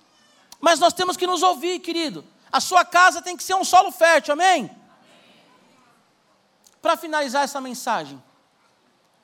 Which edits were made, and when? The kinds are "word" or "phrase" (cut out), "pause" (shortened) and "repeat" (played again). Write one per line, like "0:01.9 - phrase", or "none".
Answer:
none